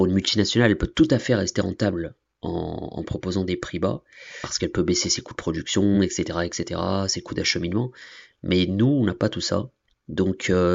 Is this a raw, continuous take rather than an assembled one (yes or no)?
yes